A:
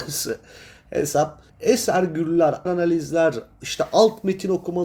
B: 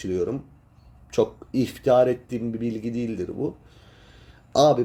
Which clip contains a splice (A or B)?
A